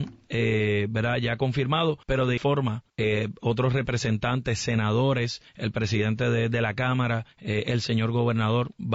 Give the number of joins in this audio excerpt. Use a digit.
5